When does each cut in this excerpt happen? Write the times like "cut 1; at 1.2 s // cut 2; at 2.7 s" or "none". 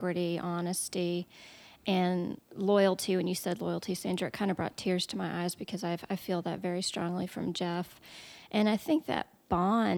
cut 1; at 2.4 s